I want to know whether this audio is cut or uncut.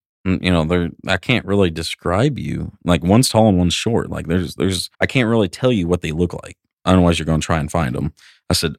cut